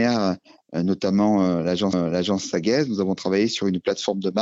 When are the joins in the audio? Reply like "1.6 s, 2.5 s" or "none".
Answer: 1.9 s